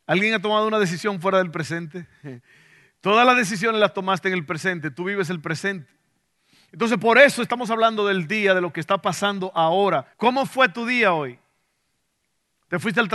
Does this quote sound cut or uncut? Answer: cut